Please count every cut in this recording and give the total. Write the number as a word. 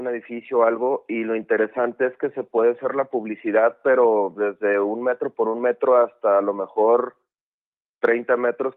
zero